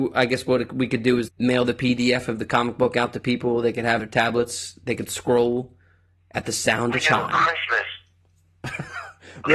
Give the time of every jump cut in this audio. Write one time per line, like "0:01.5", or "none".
0:01.3
0:04.0
0:07.0